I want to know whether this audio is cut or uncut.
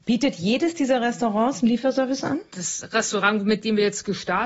uncut